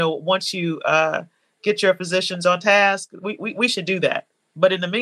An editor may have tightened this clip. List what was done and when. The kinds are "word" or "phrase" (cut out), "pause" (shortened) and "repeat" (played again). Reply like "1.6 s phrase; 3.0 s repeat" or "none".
none